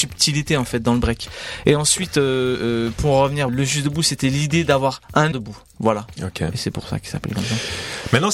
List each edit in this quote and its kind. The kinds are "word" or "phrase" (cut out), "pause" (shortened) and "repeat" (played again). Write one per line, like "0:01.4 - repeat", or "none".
0:03.5 - phrase
0:05.3 - phrase